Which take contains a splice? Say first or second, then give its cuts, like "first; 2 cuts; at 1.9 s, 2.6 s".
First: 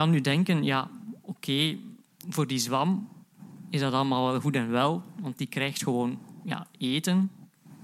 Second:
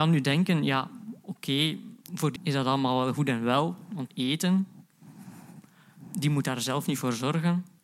second; 3 cuts; at 2.0 s, 2.4 s, 4.1 s